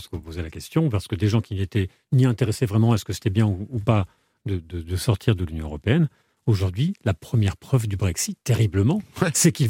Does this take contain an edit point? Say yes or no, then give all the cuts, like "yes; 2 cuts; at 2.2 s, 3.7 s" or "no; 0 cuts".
no; 0 cuts